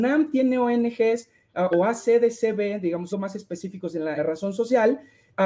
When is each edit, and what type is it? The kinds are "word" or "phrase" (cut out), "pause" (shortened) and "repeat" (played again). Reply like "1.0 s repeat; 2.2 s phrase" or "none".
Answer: 1.7 s word; 3.1 s word; 4.2 s word